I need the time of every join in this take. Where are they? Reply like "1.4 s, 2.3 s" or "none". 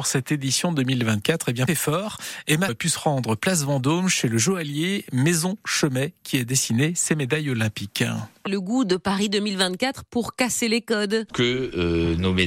1.7 s, 2.7 s, 8.5 s